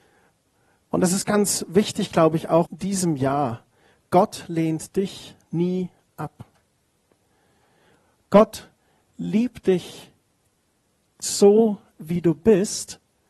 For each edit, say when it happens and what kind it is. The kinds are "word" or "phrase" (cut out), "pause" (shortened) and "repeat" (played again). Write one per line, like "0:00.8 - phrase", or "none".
0:02.7 - word